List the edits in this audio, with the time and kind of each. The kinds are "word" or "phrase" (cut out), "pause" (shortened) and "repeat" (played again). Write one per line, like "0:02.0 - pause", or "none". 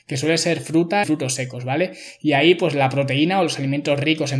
0:01.0 - word